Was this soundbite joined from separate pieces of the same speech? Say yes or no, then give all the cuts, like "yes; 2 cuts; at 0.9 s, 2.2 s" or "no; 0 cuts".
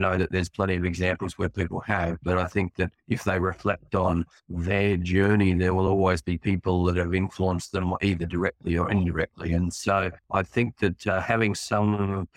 no; 0 cuts